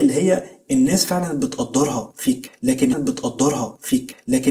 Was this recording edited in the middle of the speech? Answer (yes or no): yes